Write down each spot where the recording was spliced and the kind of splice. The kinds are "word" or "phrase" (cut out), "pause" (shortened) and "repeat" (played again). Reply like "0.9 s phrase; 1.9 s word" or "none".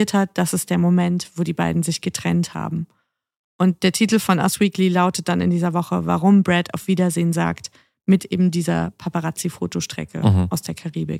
none